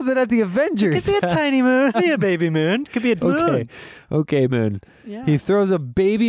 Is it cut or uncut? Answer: cut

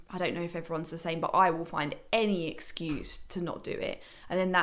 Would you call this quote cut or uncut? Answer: uncut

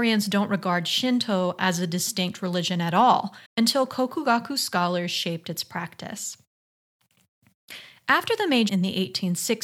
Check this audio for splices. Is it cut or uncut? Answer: cut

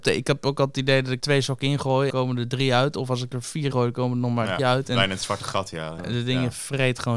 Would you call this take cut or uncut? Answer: cut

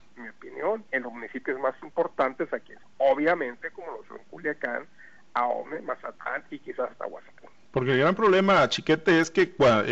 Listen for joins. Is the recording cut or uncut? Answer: cut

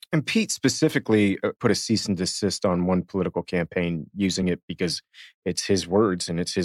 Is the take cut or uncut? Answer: uncut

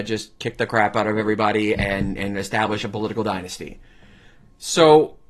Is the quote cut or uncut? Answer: uncut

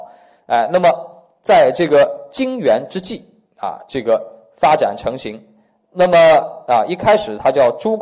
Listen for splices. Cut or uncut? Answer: uncut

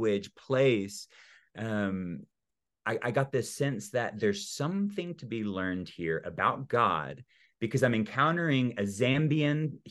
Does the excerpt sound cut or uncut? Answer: uncut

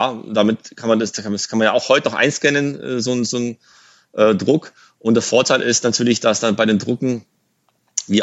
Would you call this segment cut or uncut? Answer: uncut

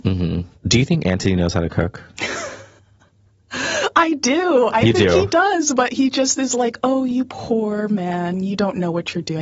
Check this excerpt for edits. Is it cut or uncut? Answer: uncut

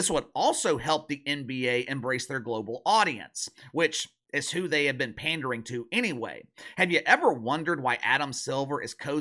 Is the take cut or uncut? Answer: uncut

